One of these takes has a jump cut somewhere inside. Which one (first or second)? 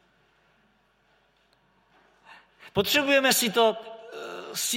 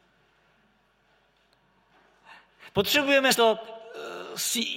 second